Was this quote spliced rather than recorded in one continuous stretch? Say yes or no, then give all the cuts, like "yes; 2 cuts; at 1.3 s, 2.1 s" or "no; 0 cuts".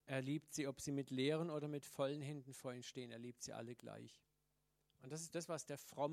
no; 0 cuts